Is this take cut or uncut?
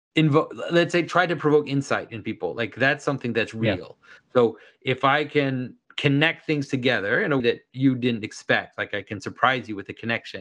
cut